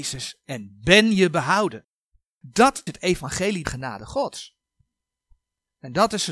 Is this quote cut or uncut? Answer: cut